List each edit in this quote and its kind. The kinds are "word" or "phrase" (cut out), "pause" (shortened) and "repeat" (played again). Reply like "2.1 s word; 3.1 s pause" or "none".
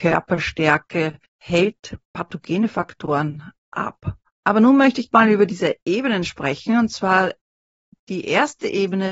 1.2 s pause; 4.3 s pause